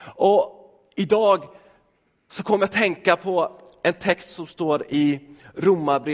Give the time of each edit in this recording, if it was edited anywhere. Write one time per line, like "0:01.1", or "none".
none